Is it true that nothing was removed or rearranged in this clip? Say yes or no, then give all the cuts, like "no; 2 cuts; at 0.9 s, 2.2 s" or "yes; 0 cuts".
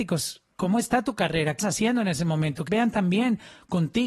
no; 2 cuts; at 1.6 s, 2.7 s